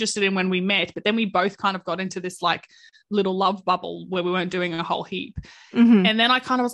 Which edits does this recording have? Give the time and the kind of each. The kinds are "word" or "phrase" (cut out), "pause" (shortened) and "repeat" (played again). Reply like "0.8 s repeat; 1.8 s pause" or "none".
none